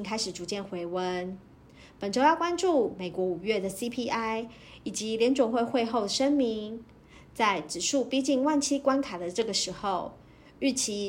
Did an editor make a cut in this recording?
no; 0 cuts

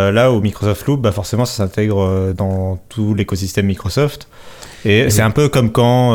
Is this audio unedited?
yes; 0 cuts

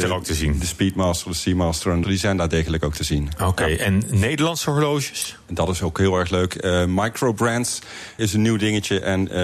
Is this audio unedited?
no; 2 cuts; at 2.0 s, 8.2 s

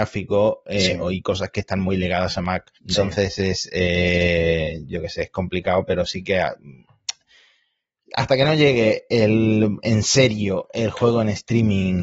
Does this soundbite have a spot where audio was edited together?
yes; 1 cut; at 2.8 s

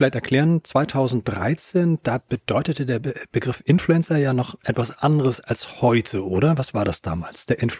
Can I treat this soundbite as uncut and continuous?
yes; 0 cuts

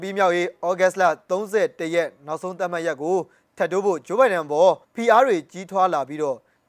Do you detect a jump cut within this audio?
yes; 1 cut; at 4.8 s

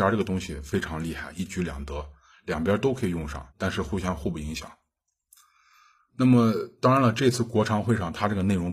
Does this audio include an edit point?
yes; 1 cut; at 3.5 s

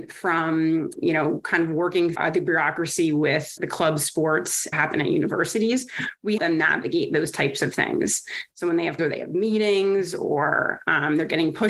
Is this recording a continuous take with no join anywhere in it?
no; 6 cuts; at 0.9 s, 2.1 s, 3.6 s, 4.7 s, 6.4 s, 9.0 s

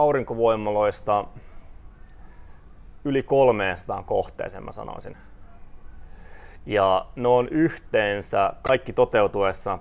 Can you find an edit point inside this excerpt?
no; 0 cuts

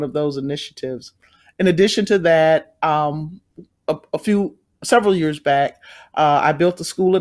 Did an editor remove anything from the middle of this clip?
no; 0 cuts

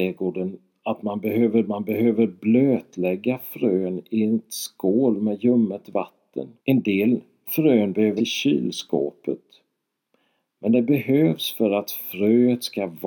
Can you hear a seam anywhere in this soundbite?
yes; 3 cuts; at 1.6 s, 6.6 s, 8.2 s

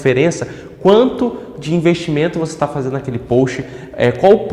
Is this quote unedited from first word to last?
yes; 0 cuts

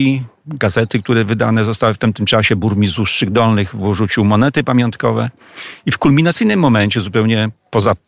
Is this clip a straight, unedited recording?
yes; 0 cuts

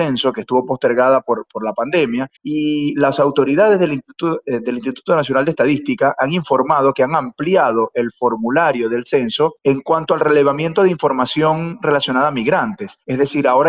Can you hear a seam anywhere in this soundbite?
yes; 2 cuts; at 2.4 s, 9.6 s

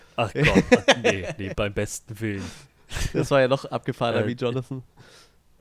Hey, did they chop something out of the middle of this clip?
yes; 1 cut; at 1.5 s

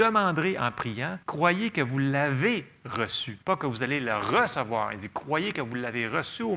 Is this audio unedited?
no; 2 cuts; at 1.2 s, 3.4 s

